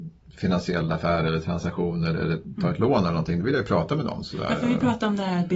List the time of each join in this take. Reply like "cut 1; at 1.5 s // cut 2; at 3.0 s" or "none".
none

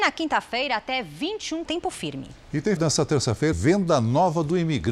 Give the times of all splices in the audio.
cut 1; at 1.6 s // cut 2; at 2.8 s // cut 3; at 3.5 s

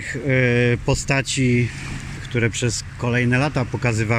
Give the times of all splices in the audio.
cut 1; at 2.2 s

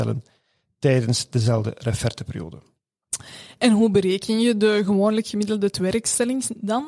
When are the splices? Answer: none

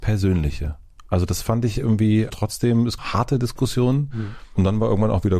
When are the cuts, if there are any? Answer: cut 1; at 2.3 s // cut 2; at 3.0 s

